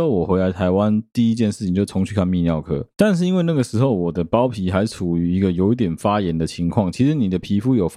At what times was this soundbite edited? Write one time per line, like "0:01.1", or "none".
none